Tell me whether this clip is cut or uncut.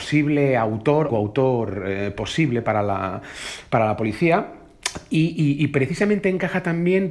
cut